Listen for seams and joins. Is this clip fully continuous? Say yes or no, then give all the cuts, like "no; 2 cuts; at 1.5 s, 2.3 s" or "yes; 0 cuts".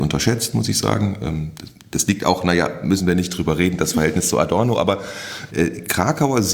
no; 1 cut; at 5.5 s